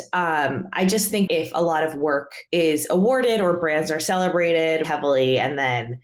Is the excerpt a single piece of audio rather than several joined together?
no; 3 cuts; at 1.3 s, 2.5 s, 4.8 s

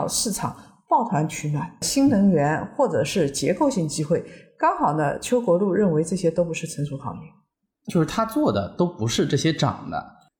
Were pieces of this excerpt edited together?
yes; 1 cut; at 7.9 s

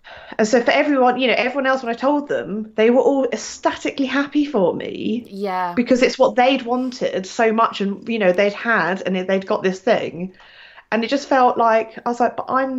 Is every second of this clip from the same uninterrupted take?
yes; 0 cuts

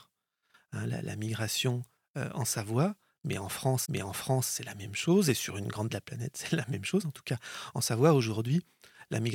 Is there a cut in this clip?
yes; 2 cuts; at 3.8 s, 5.9 s

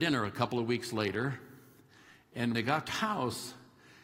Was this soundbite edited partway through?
yes; 2 cuts; at 2.5 s, 2.9 s

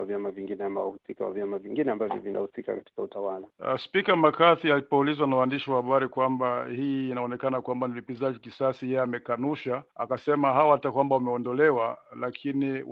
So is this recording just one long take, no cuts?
no; 2 cuts; at 3.5 s, 9.9 s

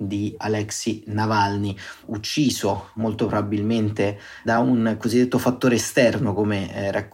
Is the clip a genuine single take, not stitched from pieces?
yes; 0 cuts

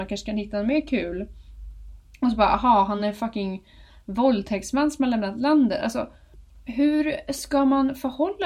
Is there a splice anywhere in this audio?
no; 0 cuts

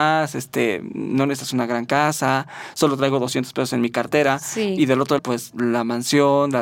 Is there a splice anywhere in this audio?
yes; 1 cut; at 5.2 s

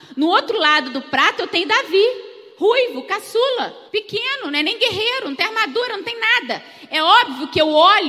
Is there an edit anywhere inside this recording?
yes; 1 cut; at 3.9 s

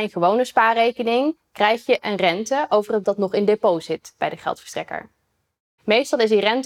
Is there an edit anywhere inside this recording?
yes; 1 cut; at 3.0 s

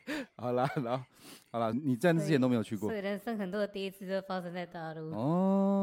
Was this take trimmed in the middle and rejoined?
yes; 1 cut; at 1.7 s

